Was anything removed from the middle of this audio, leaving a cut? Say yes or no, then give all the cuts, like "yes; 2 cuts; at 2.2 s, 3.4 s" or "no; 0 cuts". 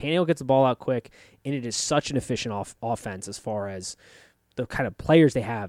no; 0 cuts